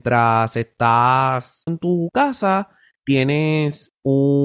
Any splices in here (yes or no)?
yes